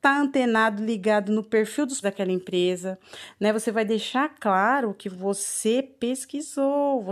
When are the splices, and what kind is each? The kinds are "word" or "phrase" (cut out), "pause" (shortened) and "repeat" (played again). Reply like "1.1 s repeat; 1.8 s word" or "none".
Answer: 2.0 s word

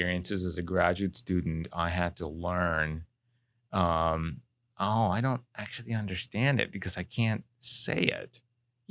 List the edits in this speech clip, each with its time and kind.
none

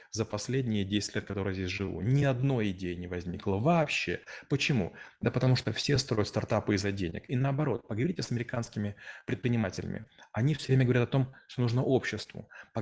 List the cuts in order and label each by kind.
none

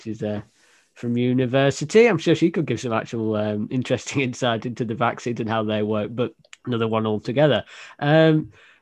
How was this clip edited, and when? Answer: 6.5 s pause

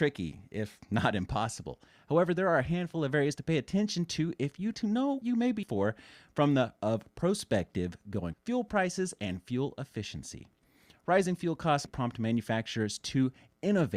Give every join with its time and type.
4.7 s word; 5.2 s word; 5.6 s word; 6.8 s word; 8.3 s word; 11.9 s word

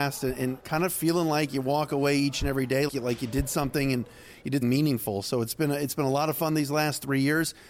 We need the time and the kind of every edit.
2.9 s word; 4.6 s word

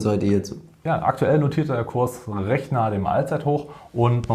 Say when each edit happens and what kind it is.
none

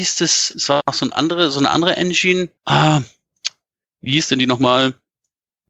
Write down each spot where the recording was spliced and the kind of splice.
2.6 s pause

